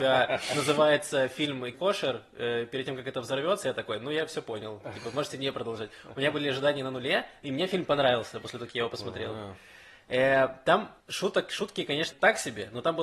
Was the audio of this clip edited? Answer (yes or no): yes